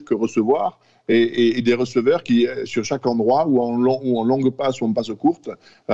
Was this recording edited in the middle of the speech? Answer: no; 0 cuts

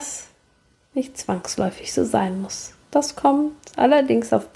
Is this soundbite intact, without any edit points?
no; 1 cut; at 2.8 s

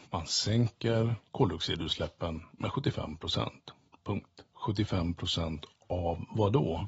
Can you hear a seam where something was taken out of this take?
no; 0 cuts

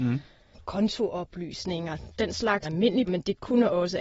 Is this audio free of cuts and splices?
no; 3 cuts; at 2.2 s, 2.6 s, 3.1 s

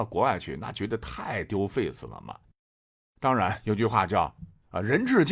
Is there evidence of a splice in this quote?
no; 0 cuts

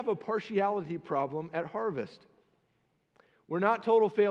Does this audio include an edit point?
no; 0 cuts

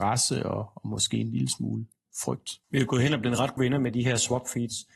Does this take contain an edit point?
yes; 2 cuts; at 2.6 s, 3.6 s

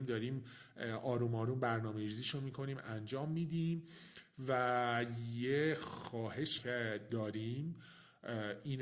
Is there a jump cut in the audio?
yes; 1 cut; at 6.6 s

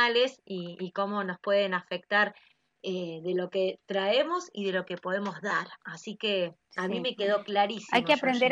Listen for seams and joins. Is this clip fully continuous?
yes; 0 cuts

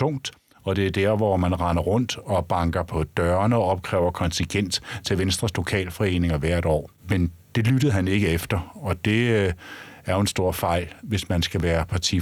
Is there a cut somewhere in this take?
yes; 1 cut; at 7.0 s

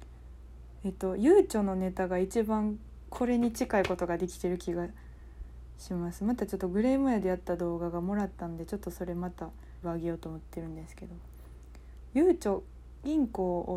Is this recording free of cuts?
no; 1 cut; at 9.8 s

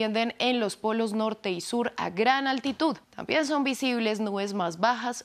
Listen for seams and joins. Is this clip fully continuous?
no; 1 cut; at 3.0 s

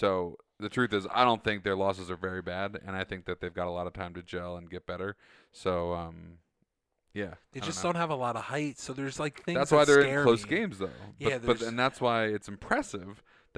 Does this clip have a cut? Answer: no; 0 cuts

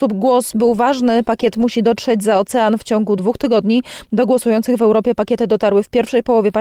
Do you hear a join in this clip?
no; 0 cuts

